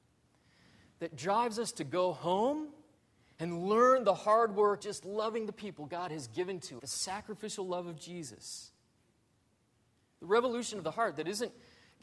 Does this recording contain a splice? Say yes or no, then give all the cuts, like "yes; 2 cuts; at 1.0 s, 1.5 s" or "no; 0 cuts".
yes; 3 cuts; at 3.0 s, 4.8 s, 6.8 s